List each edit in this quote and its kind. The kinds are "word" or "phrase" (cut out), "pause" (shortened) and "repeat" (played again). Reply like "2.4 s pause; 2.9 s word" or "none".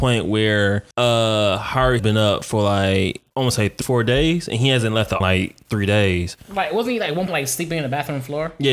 0.9 s pause; 2.0 s word; 3.3 s pause; 3.8 s word; 5.2 s phrase; 7.3 s word